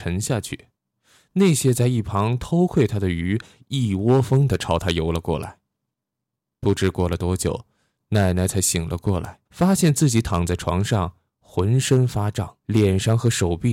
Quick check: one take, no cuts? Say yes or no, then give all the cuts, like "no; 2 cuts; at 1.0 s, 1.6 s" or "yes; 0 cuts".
no; 2 cuts; at 9.5 s, 12.6 s